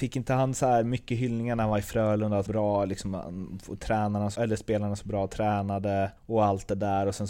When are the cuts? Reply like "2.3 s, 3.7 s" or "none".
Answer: 2.5 s, 4.4 s, 6.2 s